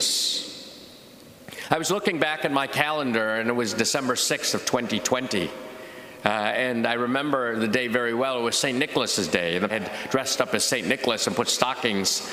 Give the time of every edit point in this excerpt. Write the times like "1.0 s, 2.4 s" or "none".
9.7 s